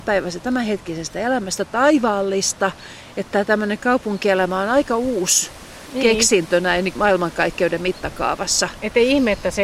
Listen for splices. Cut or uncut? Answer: cut